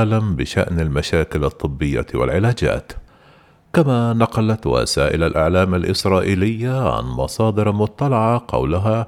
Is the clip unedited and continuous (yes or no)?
yes